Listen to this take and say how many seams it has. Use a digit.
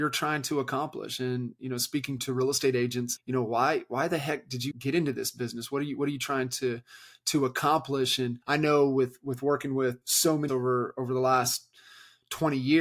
6